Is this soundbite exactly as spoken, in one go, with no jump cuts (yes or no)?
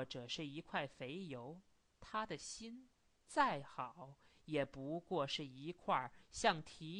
yes